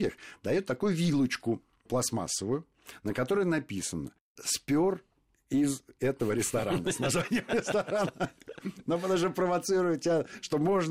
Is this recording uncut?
yes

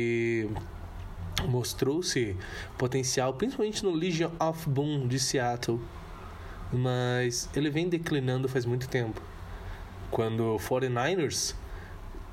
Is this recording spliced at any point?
no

